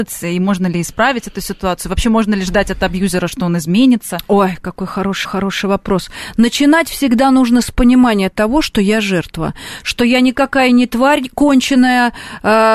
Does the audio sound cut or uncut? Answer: cut